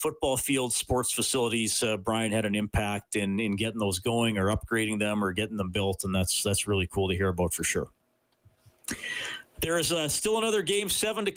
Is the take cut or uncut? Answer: uncut